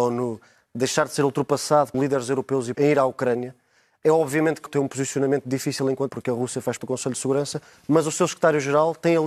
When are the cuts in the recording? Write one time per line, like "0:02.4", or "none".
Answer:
0:01.9
0:02.7
0:04.7
0:06.1
0:06.8

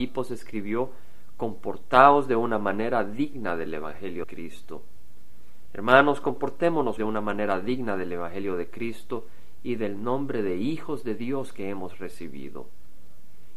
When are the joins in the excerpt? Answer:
0:04.2
0:07.0

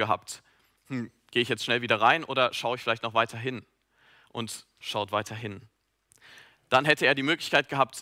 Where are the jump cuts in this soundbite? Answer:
0:04.8

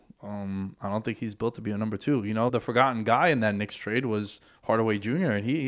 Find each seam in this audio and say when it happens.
0:02.5

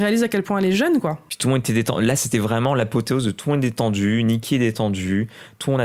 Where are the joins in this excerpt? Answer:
none

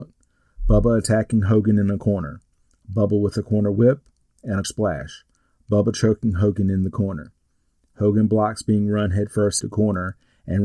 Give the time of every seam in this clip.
0:04.6
0:09.6

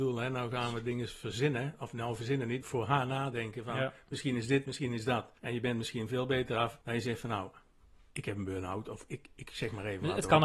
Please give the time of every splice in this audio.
0:02.6
0:05.4
0:06.8
0:08.1

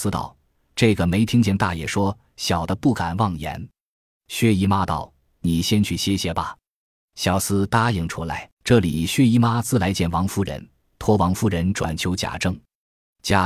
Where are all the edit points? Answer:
0:08.5

